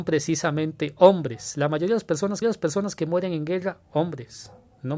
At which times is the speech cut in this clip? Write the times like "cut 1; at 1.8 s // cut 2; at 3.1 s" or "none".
cut 1; at 2.4 s